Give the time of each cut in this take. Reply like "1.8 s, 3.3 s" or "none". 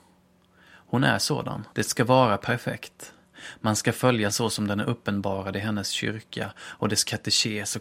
1.7 s, 4.3 s